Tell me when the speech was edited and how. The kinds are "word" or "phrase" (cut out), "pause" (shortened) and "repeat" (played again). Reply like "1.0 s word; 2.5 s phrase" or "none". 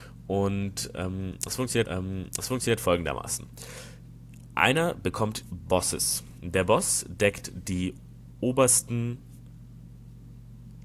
1.8 s repeat; 5.4 s phrase